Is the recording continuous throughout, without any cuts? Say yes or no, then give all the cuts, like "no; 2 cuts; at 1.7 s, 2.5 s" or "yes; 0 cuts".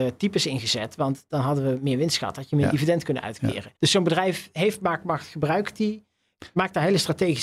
no; 1 cut; at 3.8 s